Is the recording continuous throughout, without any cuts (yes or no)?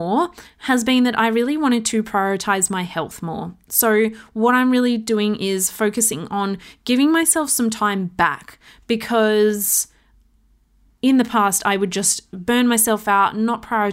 yes